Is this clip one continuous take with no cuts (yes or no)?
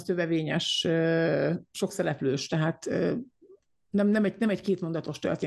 yes